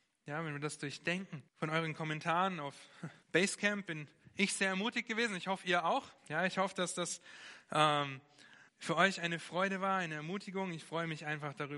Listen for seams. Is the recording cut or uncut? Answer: cut